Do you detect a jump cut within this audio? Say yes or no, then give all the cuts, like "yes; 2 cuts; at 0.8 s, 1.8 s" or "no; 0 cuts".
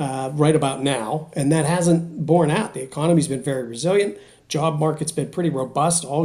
no; 0 cuts